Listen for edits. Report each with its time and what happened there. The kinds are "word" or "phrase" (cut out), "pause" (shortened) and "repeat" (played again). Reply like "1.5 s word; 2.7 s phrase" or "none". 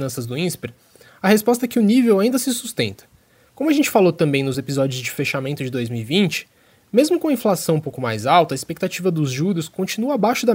none